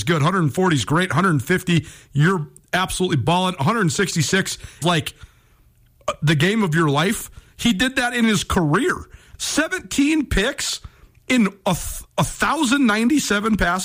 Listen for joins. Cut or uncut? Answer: cut